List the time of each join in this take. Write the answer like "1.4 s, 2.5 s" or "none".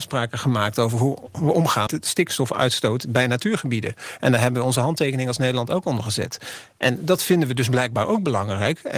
1.9 s